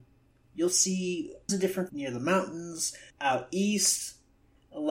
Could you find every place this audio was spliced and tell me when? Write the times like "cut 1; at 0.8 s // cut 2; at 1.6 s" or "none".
cut 1; at 1.5 s // cut 2; at 1.9 s // cut 3; at 3.1 s